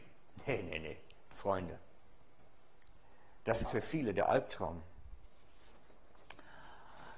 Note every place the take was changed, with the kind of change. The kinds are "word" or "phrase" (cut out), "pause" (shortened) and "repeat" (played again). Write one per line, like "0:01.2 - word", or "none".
0:03.6 - word